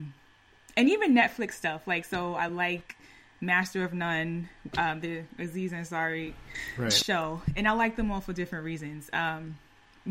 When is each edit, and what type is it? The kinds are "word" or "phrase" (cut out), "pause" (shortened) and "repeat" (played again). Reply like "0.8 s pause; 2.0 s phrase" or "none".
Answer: none